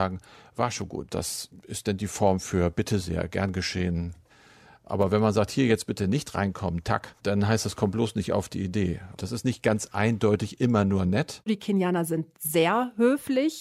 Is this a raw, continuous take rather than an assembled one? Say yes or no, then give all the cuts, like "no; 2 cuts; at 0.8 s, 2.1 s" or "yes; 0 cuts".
yes; 0 cuts